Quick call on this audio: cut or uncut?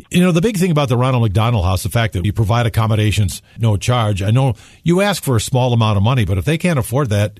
cut